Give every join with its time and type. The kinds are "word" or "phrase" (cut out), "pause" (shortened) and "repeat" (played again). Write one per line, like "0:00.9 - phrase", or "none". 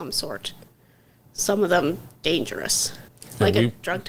0:03.1 - pause